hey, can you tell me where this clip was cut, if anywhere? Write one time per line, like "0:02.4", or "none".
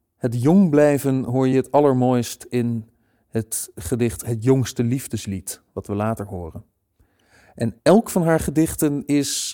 none